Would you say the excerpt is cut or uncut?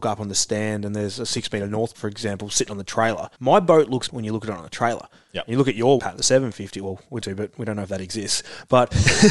cut